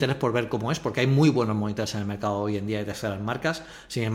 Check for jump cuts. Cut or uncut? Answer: uncut